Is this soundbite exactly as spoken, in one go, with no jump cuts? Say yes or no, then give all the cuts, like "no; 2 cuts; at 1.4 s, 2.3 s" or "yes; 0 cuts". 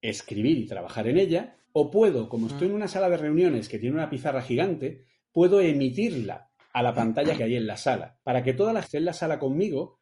no; 4 cuts; at 1.6 s, 7.4 s, 8.2 s, 8.8 s